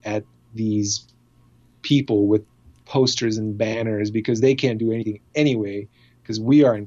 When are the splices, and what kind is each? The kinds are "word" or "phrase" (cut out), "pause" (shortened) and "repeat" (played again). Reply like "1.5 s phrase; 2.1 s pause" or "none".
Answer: none